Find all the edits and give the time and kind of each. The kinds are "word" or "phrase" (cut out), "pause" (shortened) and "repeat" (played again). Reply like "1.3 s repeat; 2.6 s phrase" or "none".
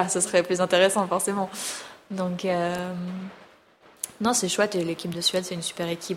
none